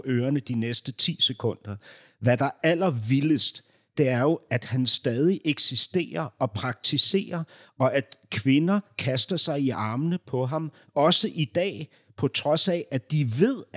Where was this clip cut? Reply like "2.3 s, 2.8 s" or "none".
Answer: none